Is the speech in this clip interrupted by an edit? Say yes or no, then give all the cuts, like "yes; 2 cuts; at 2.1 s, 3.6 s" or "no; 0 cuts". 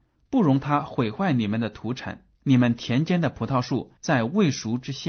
yes; 2 cuts; at 2.4 s, 4.0 s